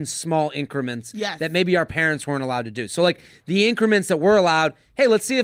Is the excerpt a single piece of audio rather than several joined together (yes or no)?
yes